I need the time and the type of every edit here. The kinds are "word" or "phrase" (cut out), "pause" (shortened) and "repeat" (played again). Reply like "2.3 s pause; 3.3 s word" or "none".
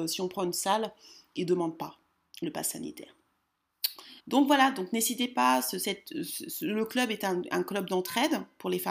4.2 s pause